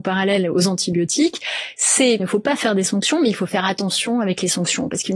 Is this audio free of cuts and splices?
no; 1 cut; at 2.2 s

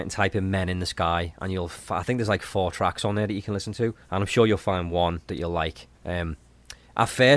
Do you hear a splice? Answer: yes; 3 cuts; at 4.0 s, 5.2 s, 5.9 s

